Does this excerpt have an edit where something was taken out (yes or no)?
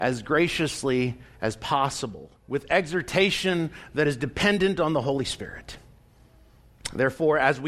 yes